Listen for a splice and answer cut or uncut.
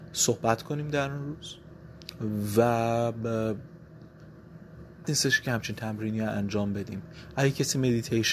cut